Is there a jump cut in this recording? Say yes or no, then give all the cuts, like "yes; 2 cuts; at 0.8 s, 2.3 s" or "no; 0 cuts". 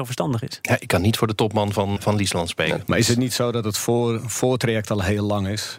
yes; 1 cut; at 2.0 s